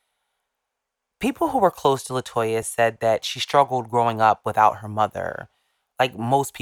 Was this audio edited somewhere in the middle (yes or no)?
no